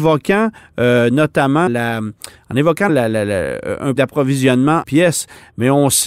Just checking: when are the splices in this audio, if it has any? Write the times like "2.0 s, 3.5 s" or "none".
1.7 s, 2.9 s, 4.0 s, 4.8 s